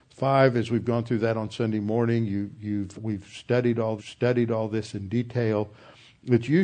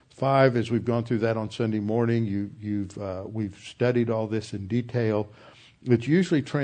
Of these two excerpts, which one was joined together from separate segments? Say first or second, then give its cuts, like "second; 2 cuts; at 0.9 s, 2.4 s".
first; 2 cuts; at 3.0 s, 4.0 s